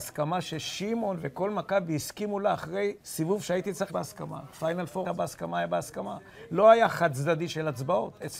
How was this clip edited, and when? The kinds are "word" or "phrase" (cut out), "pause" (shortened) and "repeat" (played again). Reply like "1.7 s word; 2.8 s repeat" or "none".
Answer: 3.0 s pause; 3.9 s phrase; 5.0 s word